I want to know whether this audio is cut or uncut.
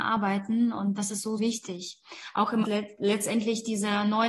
cut